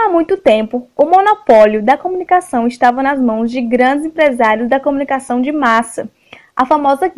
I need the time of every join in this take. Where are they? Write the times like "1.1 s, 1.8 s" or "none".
none